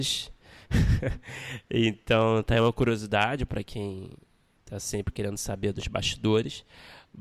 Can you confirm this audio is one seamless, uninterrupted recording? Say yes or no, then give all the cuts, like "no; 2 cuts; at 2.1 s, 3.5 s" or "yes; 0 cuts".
yes; 0 cuts